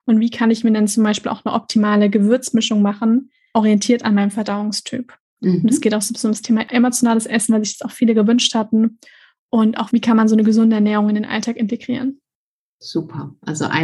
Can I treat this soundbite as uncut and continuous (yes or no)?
yes